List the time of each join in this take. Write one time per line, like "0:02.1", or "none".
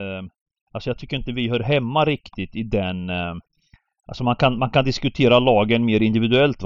none